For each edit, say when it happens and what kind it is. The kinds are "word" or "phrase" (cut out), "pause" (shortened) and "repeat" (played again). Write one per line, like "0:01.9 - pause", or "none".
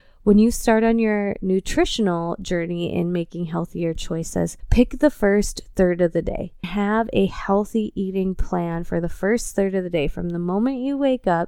0:04.6 - pause
0:06.6 - word